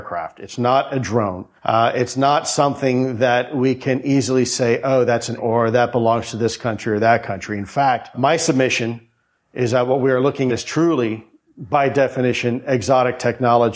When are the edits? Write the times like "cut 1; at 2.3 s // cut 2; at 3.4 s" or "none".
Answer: cut 1; at 5.4 s // cut 2; at 8.1 s // cut 3; at 10.5 s